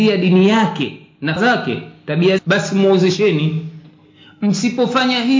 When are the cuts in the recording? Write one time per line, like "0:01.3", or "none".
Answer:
0:01.4
0:02.4